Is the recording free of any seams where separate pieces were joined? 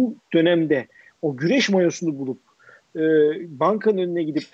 yes; 0 cuts

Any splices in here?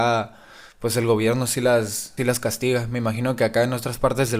yes; 1 cut; at 2.2 s

